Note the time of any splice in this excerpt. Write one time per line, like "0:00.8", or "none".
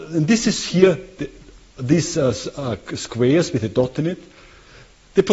none